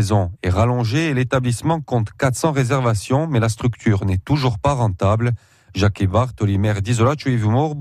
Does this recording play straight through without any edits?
yes; 0 cuts

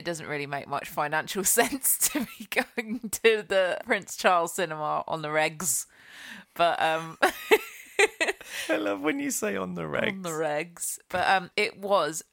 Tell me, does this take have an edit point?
yes; 1 cut; at 3.8 s

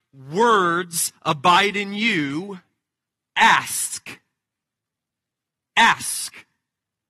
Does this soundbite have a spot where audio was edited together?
no; 0 cuts

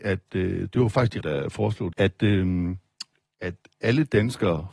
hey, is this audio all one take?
no; 2 cuts; at 1.2 s, 1.9 s

